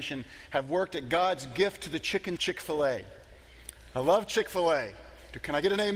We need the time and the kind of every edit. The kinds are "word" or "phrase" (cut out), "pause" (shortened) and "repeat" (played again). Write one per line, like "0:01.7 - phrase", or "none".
0:02.4 - word

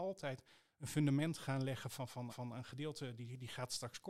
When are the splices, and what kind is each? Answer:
0:02.3 - repeat

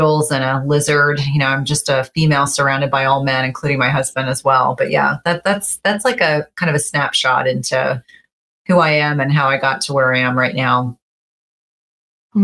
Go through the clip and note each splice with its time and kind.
none

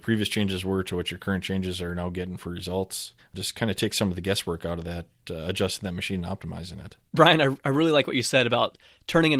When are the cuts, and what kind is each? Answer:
0:03.2 - pause
0:07.1 - pause

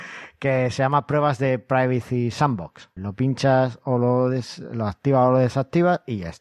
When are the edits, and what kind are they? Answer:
0:03.0 - word

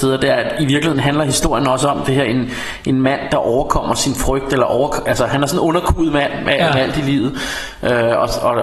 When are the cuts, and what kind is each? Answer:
none

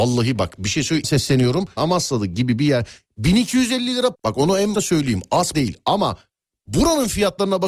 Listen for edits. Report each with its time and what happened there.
0:01.0 - word
0:01.8 - word
0:04.1 - word
0:04.7 - word
0:05.5 - word

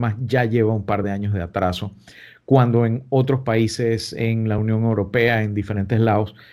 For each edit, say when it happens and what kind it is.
none

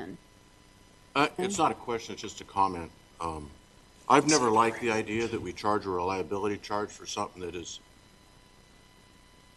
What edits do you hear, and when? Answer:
none

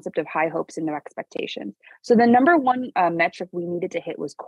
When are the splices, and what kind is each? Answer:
none

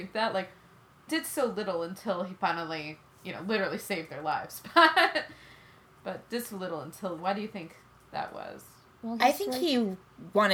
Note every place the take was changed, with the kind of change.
0:01.1 - word
0:07.2 - word

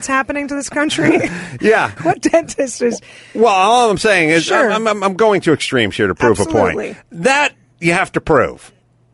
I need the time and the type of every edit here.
0:02.0 - word

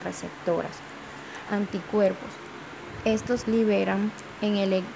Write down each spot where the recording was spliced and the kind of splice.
0:01.5 - word
0:03.4 - word

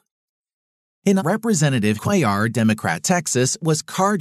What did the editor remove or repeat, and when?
0:01.2 - word
0:02.0 - word

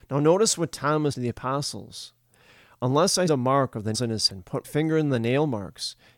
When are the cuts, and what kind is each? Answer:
0:01.1 - word
0:03.3 - word
0:03.9 - word
0:04.3 - word
0:04.6 - word

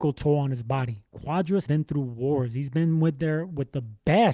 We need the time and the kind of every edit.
0:01.7 - word

